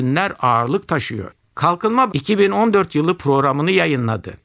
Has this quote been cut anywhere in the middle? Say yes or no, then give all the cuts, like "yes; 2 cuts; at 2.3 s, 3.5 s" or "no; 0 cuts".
yes; 1 cut; at 2.1 s